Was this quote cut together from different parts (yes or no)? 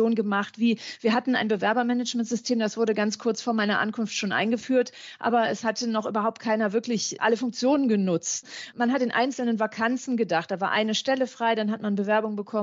no